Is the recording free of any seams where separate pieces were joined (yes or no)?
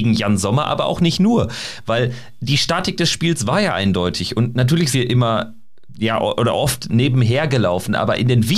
no